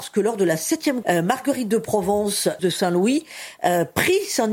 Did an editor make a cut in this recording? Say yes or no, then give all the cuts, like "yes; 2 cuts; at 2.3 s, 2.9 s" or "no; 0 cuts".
yes; 2 cuts; at 1.0 s, 2.6 s